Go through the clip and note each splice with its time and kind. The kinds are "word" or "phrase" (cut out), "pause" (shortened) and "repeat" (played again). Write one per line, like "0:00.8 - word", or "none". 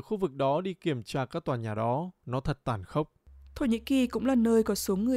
none